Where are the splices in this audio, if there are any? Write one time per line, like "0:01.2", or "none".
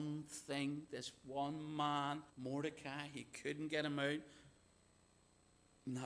0:02.3